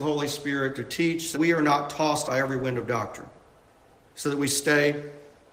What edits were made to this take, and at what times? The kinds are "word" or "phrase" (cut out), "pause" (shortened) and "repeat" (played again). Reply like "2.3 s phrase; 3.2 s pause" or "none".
1.3 s word; 2.3 s word